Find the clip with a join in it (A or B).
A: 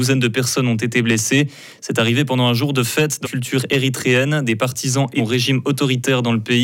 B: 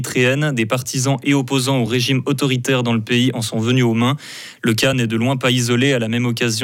A